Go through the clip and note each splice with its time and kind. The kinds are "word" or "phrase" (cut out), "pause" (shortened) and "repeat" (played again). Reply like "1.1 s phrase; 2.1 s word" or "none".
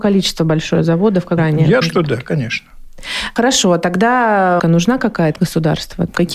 1.4 s word; 1.8 s word; 4.6 s word; 5.4 s word

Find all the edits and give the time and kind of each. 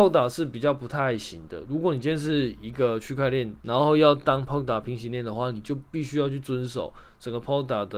3.6 s pause

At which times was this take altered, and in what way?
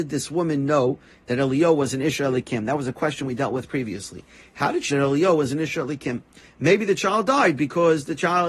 4.9 s word

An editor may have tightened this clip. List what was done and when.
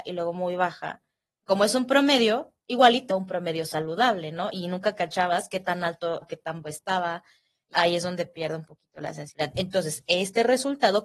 3.1 s word; 6.2 s word; 6.6 s word; 7.7 s word

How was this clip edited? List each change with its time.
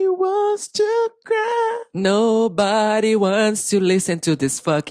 none

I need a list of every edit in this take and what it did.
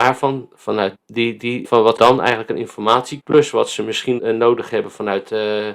0.9 s word; 1.6 s word; 2.0 s word; 3.2 s word; 4.2 s word

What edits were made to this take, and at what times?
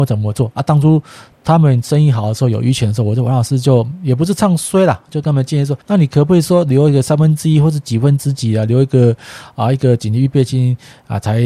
5.8 s pause

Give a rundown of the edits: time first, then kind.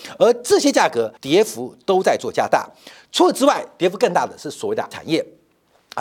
1.2 s pause; 4.9 s word

